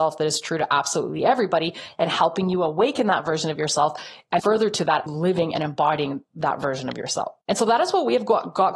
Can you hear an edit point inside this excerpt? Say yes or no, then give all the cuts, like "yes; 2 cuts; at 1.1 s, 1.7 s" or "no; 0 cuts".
yes; 3 cuts; at 4.4 s, 5.1 s, 7.4 s